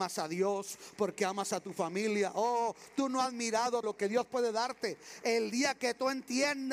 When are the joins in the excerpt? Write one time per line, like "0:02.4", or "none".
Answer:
0:03.8